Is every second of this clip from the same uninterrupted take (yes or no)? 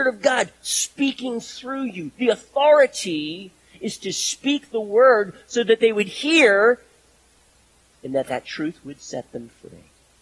yes